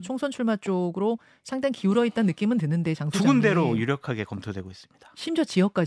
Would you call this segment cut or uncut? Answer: uncut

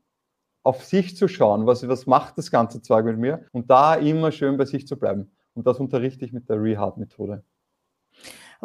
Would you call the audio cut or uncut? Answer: cut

